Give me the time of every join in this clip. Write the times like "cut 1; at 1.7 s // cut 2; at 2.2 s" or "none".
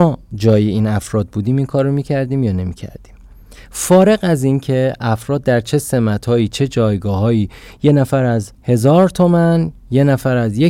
cut 1; at 8.5 s